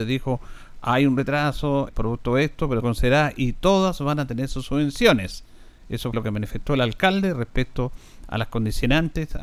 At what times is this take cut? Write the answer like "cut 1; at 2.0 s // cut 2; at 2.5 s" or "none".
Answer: cut 1; at 1.9 s // cut 2; at 2.8 s // cut 3; at 6.1 s